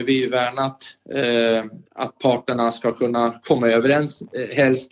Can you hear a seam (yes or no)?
yes